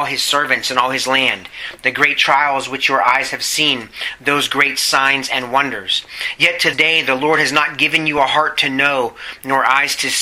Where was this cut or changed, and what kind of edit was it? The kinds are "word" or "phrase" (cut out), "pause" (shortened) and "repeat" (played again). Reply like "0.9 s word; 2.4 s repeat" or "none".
6.7 s word